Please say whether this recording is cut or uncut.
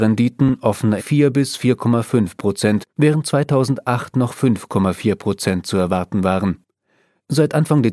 cut